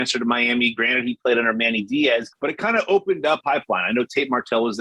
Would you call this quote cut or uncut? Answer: cut